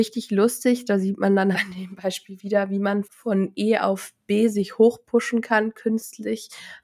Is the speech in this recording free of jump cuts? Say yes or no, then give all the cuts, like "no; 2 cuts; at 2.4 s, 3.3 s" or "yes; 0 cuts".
no; 2 cuts; at 1.5 s, 3.0 s